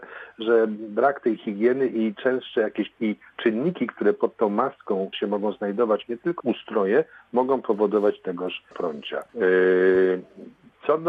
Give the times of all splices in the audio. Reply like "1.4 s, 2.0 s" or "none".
2.9 s, 5.1 s, 6.4 s, 8.7 s, 9.3 s